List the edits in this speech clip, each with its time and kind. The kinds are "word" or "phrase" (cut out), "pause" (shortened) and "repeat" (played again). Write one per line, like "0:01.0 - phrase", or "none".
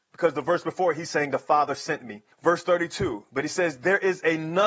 0:02.3 - pause